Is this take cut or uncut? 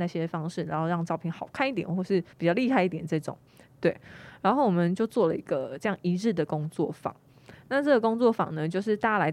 cut